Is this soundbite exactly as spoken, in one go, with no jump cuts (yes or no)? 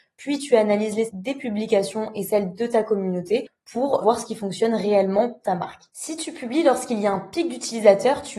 no